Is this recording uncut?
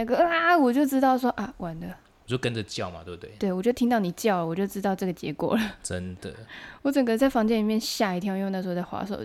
yes; 0 cuts

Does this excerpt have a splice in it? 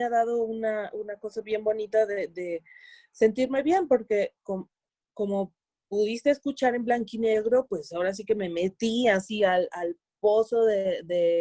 no; 0 cuts

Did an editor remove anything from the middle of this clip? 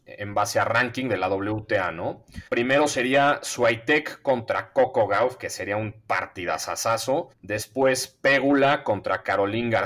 yes; 2 cuts; at 2.5 s, 7.3 s

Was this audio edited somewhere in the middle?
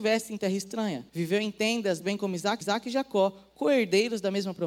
yes; 2 cuts; at 1.1 s, 2.6 s

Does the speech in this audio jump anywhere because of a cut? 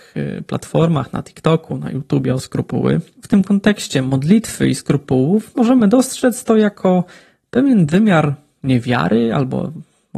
no; 0 cuts

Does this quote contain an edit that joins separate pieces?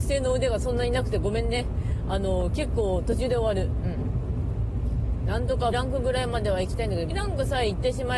yes; 2 cuts; at 5.7 s, 7.1 s

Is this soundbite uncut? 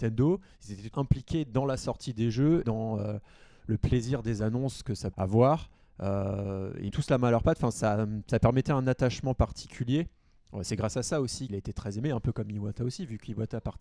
no; 6 cuts; at 0.9 s, 2.6 s, 5.1 s, 6.9 s, 7.7 s, 11.5 s

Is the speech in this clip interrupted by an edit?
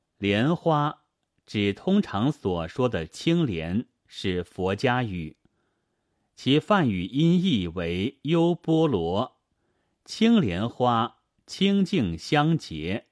no; 0 cuts

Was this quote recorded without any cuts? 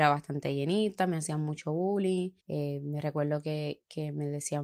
no; 1 cut; at 2.4 s

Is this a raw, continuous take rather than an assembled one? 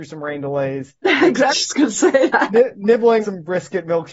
no; 2 cuts; at 1.5 s, 3.2 s

